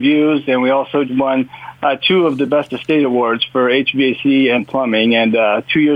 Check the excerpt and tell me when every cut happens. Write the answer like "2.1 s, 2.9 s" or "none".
1.1 s, 4.6 s

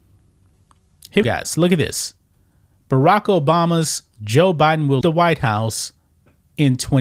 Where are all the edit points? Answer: 1.2 s, 4.1 s, 5.0 s

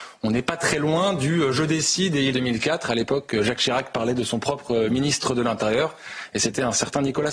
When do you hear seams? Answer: 2.3 s

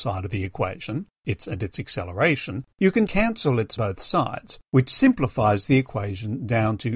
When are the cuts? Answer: 1.5 s, 2.7 s, 3.1 s, 3.8 s, 4.6 s

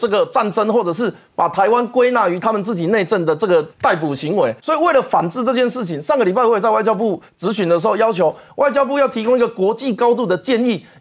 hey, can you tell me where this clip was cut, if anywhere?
3.7 s, 4.6 s

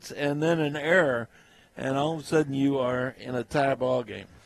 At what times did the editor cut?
none

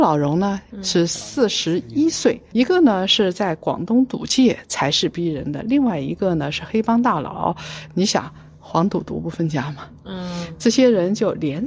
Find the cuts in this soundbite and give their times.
2.5 s

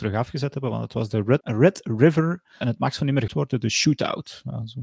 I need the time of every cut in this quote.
1.4 s, 2.6 s, 3.3 s

